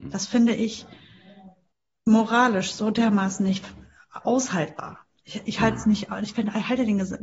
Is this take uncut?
yes; 0 cuts

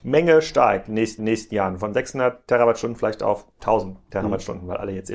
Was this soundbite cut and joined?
yes; 2 cuts; at 1.2 s, 3.5 s

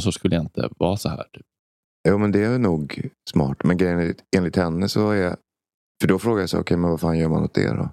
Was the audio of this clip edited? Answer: no; 0 cuts

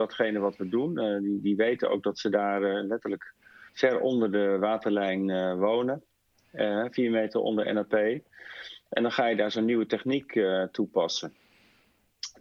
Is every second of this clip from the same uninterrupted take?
no; 1 cut; at 3.7 s

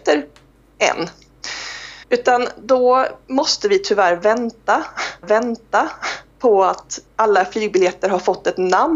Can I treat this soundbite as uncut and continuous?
no; 4 cuts; at 2.0 s, 3.2 s, 5.2 s, 7.1 s

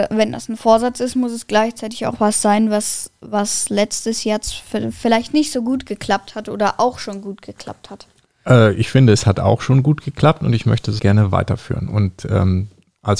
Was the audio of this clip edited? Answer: yes; 1 cut; at 11.0 s

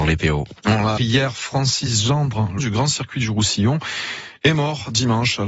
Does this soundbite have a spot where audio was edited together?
yes; 2 cuts; at 1.0 s, 2.6 s

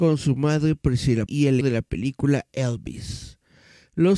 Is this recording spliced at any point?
yes; 2 cuts; at 1.3 s, 1.6 s

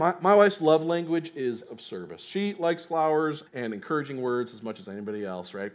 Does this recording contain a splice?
yes; 2 cuts; at 1.7 s, 3.5 s

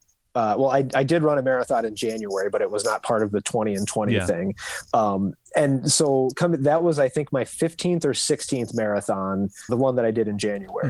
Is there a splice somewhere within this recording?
yes; 1 cut; at 9.7 s

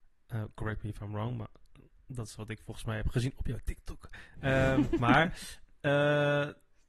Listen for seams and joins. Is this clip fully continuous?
yes; 0 cuts

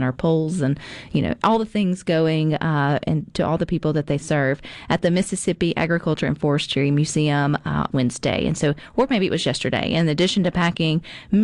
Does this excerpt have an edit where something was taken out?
yes; 1 cut; at 7.9 s

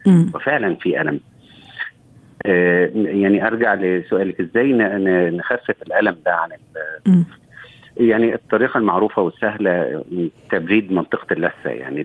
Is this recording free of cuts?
yes; 0 cuts

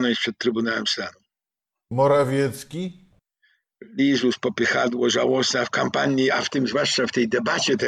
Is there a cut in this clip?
no; 0 cuts

